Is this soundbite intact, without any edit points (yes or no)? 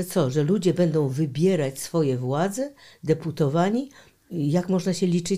yes